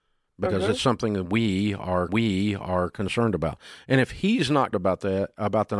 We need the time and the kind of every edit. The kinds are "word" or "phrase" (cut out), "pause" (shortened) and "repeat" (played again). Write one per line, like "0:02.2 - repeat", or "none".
0:02.1 - repeat
0:04.7 - word